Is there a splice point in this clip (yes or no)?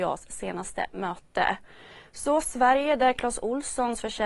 no